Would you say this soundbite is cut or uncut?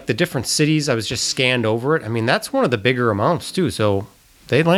uncut